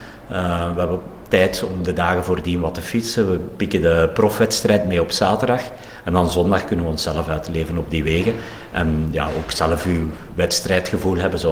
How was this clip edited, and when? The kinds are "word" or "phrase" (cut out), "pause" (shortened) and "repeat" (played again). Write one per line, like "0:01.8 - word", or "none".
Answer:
none